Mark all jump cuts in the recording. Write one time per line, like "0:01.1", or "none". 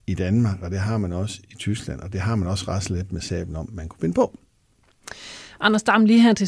none

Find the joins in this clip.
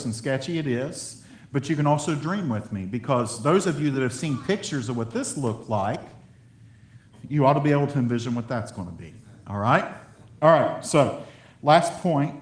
none

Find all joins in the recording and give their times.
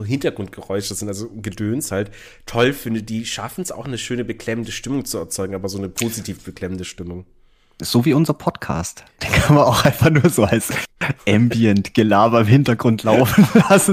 none

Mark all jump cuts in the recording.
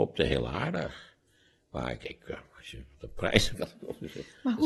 0:02.7
0:03.5

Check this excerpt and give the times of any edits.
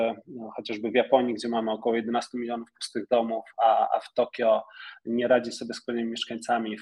none

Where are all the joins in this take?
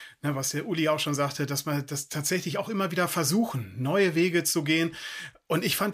none

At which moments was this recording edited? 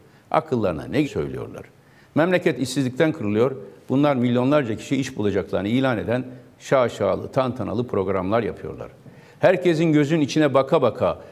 0:01.0

